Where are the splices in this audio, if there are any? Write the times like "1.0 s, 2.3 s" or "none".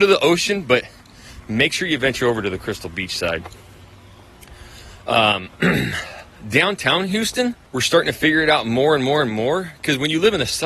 7.6 s